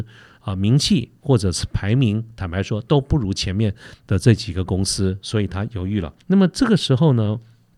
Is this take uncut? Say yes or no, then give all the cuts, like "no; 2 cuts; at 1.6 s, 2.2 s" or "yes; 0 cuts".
no; 1 cut; at 6.2 s